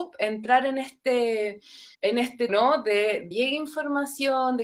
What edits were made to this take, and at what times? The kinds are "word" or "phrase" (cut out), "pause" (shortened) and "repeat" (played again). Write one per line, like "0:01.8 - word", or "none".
0:01.9 - pause
0:02.5 - word
0:03.3 - phrase